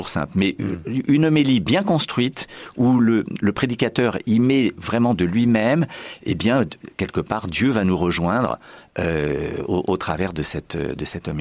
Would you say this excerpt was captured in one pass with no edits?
yes; 0 cuts

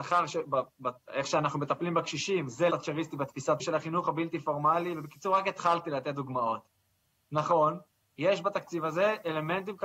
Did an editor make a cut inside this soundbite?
yes; 3 cuts; at 1.0 s, 2.7 s, 3.6 s

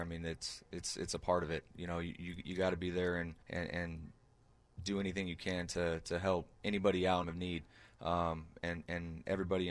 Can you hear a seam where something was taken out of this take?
yes; 3 cuts; at 3.4 s, 6.5 s, 7.2 s

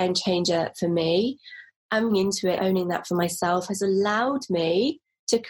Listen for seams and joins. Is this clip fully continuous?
no; 2 cuts; at 2.1 s, 2.6 s

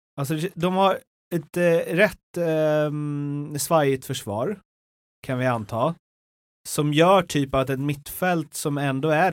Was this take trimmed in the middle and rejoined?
no; 0 cuts

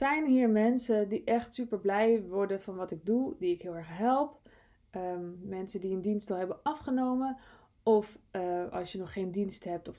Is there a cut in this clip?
no; 0 cuts

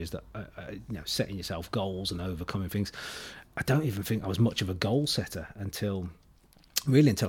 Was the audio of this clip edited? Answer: no; 0 cuts

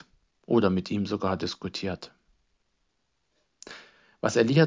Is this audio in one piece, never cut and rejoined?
yes; 0 cuts

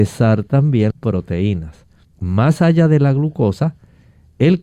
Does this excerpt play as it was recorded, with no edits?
no; 2 cuts; at 0.9 s, 2.0 s

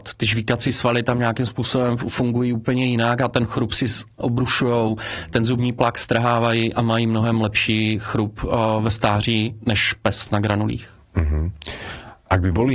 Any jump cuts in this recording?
yes; 1 cut; at 4.2 s

